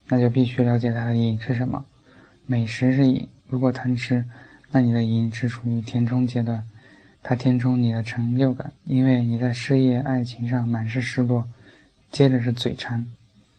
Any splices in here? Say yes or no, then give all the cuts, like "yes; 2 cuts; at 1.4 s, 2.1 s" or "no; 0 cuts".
yes; 2 cuts; at 3.4 s, 8.8 s